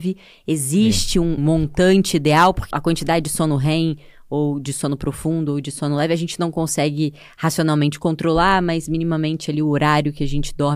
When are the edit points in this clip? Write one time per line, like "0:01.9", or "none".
0:01.4
0:02.7